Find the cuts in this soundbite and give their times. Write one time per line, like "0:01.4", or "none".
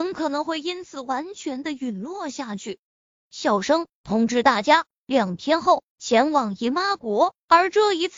0:03.0